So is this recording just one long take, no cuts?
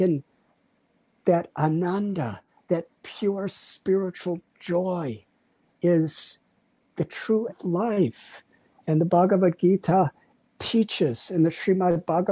no; 1 cut; at 7.5 s

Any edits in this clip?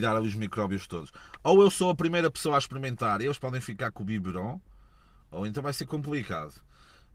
no; 0 cuts

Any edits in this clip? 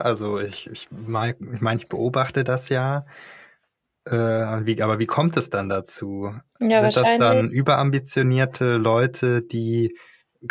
no; 0 cuts

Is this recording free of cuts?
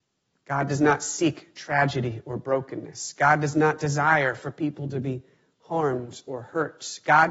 yes; 0 cuts

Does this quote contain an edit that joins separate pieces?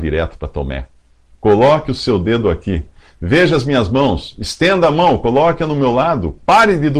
no; 0 cuts

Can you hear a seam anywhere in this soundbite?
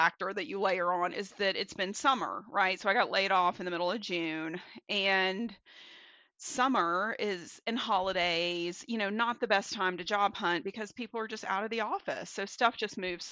no; 0 cuts

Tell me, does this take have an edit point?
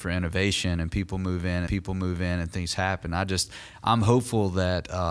yes; 1 cut; at 1.7 s

